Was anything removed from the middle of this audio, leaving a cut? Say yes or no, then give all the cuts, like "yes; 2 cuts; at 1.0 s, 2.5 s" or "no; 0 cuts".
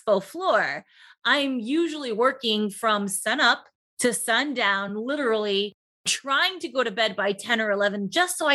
no; 0 cuts